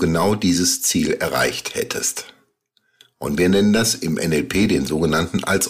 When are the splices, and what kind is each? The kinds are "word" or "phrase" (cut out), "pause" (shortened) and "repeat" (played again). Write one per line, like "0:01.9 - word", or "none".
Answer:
none